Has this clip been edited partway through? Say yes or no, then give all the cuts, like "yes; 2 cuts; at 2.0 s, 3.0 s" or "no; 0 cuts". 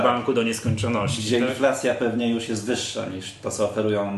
no; 0 cuts